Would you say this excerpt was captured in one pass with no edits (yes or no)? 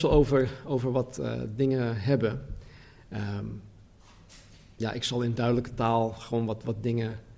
yes